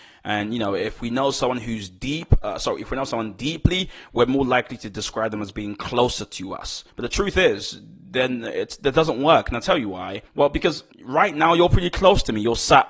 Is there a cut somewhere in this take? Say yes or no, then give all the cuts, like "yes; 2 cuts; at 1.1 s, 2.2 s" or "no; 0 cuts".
yes; 3 cuts; at 6.9 s, 10.3 s, 10.9 s